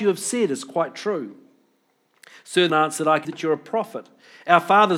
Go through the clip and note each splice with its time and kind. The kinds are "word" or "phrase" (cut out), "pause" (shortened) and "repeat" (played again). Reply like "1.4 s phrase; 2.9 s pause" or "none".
2.7 s word; 3.2 s word